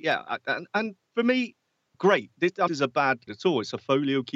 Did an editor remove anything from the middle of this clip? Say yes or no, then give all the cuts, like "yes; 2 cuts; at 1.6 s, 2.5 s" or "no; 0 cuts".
yes; 4 cuts; at 1.1 s, 1.9 s, 2.7 s, 3.3 s